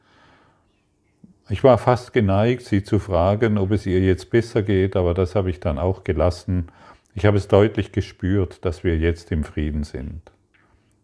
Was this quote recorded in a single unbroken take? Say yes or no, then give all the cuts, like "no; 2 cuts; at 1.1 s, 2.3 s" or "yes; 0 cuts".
yes; 0 cuts